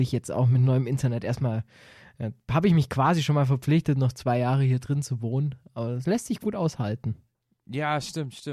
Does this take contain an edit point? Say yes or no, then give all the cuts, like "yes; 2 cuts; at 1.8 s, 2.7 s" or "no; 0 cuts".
no; 0 cuts